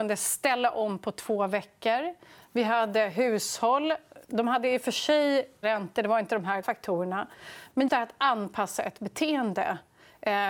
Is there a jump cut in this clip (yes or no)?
yes